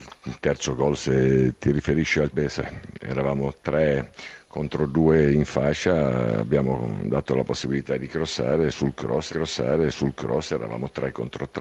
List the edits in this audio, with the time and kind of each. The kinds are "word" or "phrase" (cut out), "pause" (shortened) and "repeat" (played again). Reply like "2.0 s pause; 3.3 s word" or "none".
2.3 s phrase; 9.3 s repeat